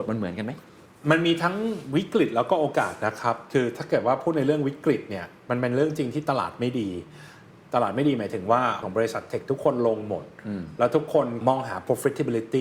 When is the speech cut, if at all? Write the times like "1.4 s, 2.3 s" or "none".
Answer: 8.8 s